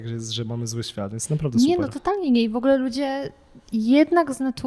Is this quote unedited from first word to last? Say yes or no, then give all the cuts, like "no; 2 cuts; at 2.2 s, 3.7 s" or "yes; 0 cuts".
yes; 0 cuts